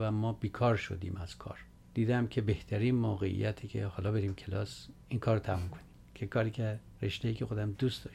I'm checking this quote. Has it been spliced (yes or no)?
no